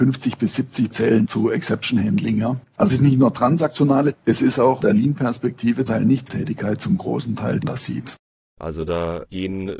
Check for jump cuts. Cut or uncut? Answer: cut